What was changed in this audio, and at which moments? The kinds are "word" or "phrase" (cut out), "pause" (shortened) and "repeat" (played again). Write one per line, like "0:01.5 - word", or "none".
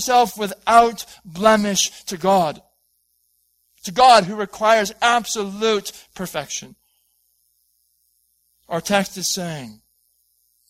none